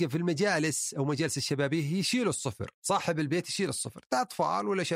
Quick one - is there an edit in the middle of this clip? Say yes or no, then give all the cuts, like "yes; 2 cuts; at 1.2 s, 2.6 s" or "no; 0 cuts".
yes; 1 cut; at 2.8 s